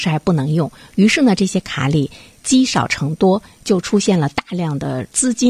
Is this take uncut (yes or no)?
yes